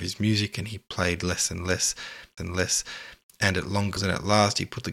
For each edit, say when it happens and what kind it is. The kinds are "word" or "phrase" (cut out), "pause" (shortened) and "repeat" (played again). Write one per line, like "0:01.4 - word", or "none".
0:02.4 - repeat
0:04.0 - word

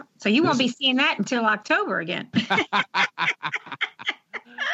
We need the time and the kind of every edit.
none

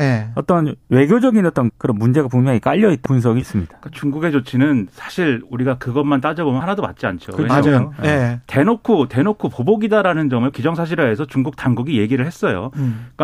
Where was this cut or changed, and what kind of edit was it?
0:01.7 - word
0:03.1 - word
0:03.4 - phrase
0:06.6 - word
0:10.5 - word

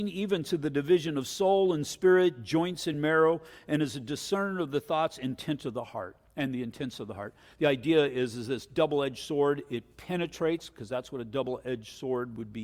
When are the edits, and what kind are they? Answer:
none

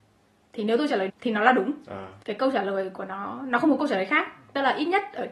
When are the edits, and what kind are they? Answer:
0:01.1 - word
0:02.2 - pause

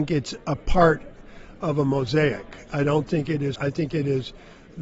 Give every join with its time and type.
0:03.5 - word

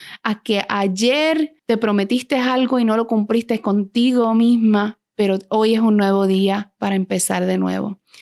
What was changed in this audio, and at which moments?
0:01.6 - pause

